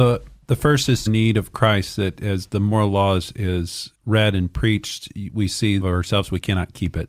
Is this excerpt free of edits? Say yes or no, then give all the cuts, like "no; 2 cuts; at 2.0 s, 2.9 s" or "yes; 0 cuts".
no; 3 cuts; at 1.1 s, 3.9 s, 5.8 s